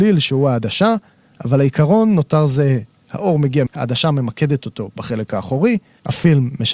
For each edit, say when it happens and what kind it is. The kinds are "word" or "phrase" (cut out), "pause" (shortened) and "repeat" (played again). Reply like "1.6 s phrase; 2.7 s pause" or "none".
3.7 s word